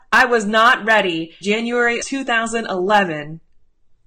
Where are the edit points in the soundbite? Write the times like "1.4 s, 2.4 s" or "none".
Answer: 1.4 s, 2.0 s